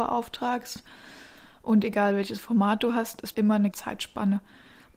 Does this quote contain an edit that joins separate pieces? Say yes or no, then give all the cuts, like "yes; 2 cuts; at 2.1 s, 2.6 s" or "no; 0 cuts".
yes; 2 cuts; at 3.3 s, 3.7 s